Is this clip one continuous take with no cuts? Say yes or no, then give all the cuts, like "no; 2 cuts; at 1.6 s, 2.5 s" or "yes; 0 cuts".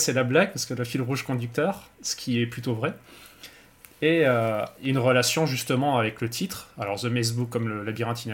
yes; 0 cuts